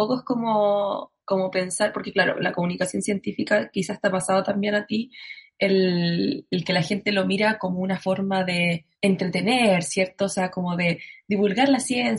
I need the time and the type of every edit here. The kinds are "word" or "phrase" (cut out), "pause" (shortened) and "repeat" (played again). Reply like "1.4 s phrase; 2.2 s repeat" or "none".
8.9 s pause